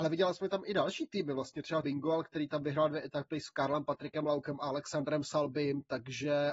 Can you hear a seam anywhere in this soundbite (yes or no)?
yes